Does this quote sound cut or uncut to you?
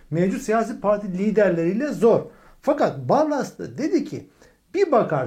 uncut